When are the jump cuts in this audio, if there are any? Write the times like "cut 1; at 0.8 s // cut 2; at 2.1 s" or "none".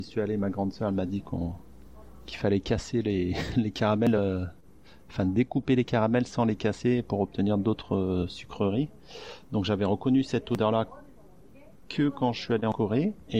none